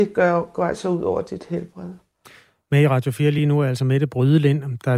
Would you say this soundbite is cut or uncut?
uncut